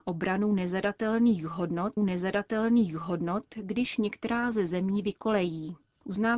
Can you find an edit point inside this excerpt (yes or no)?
yes